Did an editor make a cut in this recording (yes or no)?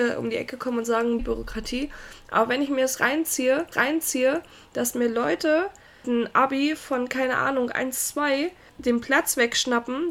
yes